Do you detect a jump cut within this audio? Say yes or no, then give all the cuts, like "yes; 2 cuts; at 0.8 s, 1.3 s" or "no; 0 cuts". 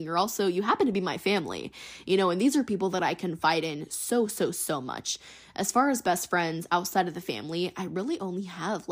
no; 0 cuts